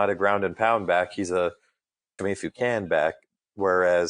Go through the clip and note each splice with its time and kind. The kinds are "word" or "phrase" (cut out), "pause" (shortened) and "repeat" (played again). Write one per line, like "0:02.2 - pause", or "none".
0:02.2 - word